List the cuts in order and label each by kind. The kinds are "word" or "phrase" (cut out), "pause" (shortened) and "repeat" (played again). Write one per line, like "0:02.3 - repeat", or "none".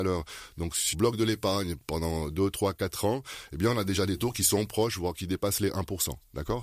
0:00.9 - word